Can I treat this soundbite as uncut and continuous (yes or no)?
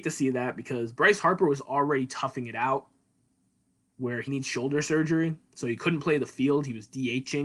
no